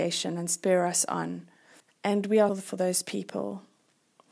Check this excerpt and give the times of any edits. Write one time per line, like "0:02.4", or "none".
0:01.8
0:02.5